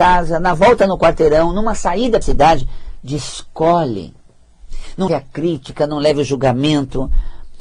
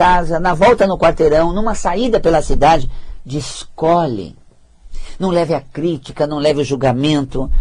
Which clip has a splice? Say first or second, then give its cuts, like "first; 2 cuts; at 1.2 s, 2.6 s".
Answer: first; 2 cuts; at 2.2 s, 5.1 s